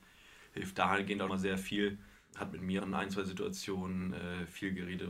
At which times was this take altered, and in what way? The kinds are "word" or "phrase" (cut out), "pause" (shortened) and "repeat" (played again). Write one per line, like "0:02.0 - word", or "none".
0:01.3 - word
0:02.8 - word